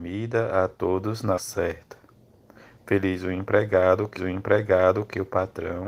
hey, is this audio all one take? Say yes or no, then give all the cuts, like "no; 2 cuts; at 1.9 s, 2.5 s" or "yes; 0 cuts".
no; 2 cuts; at 1.4 s, 4.2 s